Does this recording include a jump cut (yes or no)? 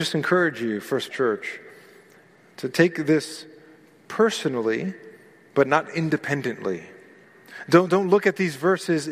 yes